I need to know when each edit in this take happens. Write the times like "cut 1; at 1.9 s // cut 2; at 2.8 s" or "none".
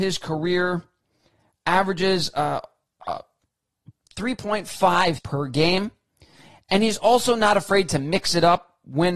cut 1; at 5.2 s